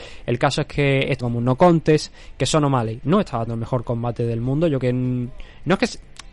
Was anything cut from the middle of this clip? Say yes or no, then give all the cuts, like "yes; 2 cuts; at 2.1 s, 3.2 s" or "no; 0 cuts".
yes; 4 cuts; at 1.2 s, 3.0 s, 3.5 s, 4.8 s